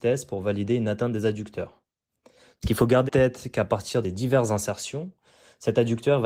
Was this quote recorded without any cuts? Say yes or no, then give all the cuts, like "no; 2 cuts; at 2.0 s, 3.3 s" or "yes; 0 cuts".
no; 3 cuts; at 2.6 s, 3.1 s, 4.0 s